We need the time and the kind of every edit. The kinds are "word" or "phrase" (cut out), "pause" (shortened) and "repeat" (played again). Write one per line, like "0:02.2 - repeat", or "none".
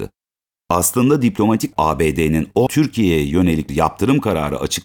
0:01.7 - word
0:02.7 - word
0:03.7 - word